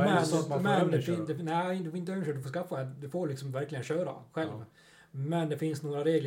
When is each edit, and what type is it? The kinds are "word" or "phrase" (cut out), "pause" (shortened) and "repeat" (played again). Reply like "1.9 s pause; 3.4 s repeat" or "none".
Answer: none